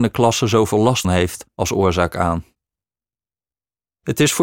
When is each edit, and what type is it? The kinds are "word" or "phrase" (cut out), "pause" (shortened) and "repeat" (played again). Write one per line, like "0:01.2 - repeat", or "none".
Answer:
0:01.0 - word